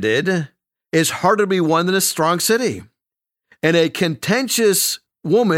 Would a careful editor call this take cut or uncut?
uncut